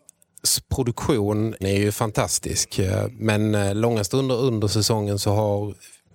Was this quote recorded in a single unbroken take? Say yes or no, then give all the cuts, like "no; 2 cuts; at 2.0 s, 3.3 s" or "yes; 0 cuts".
no; 1 cut; at 1.6 s